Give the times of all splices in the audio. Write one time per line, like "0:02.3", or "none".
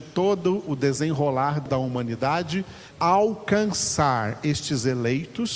0:01.7
0:02.9

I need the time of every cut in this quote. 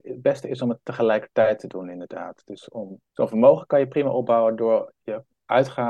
0:03.1

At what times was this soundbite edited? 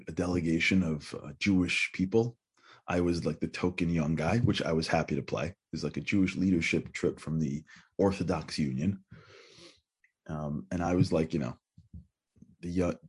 none

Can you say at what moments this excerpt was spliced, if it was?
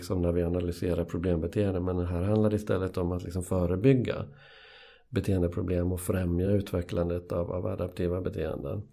none

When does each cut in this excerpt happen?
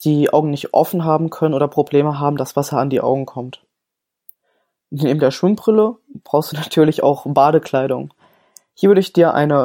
none

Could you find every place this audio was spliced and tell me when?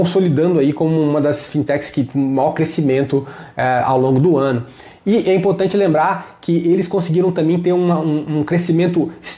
none

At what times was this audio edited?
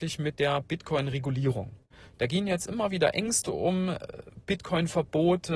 none

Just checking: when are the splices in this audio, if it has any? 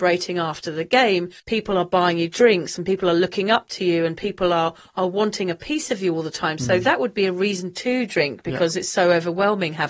0:01.4

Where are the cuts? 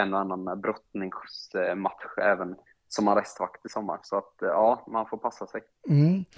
0:02.7

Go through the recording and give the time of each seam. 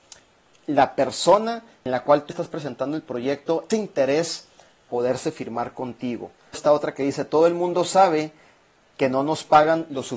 0:02.3
0:03.7
0:04.9
0:06.5

